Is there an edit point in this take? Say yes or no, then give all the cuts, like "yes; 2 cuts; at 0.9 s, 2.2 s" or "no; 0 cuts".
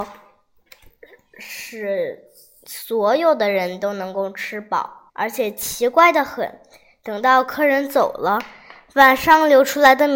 yes; 1 cut; at 5.1 s